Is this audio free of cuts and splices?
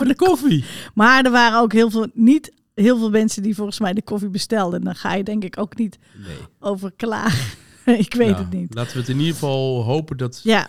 no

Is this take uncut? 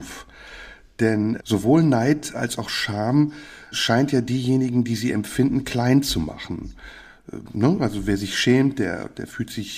no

